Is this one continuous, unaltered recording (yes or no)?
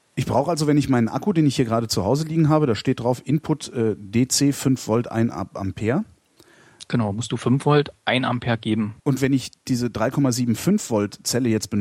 no